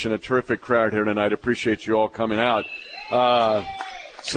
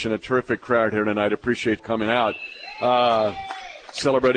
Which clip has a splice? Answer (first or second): second